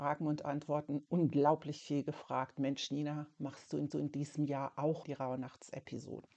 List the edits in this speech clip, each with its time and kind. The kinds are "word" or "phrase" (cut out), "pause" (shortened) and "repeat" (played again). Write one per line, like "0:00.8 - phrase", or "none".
0:03.9 - repeat
0:05.0 - word

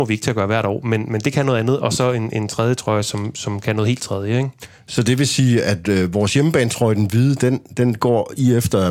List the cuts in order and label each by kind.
none

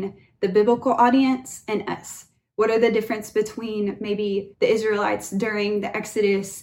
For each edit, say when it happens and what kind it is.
0:04.5 - pause

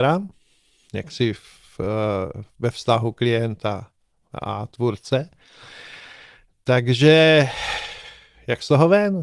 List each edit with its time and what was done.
none

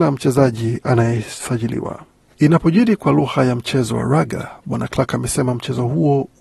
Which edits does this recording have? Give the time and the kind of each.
none

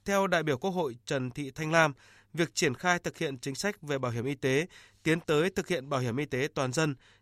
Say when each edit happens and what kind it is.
none

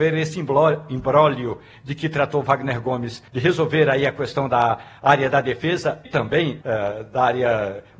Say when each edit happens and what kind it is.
0:03.3 - pause
0:06.0 - word
0:06.6 - word

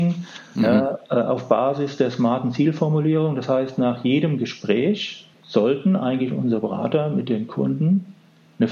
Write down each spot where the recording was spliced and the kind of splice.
0:05.3 - pause

